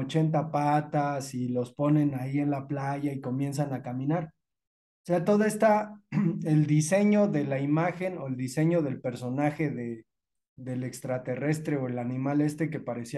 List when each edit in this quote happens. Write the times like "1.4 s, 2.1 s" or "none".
none